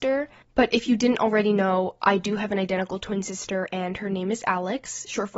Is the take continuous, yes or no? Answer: yes